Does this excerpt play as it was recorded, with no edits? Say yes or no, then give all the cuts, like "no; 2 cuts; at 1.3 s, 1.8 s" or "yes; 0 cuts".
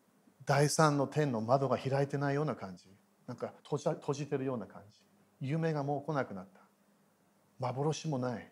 no; 1 cut; at 3.6 s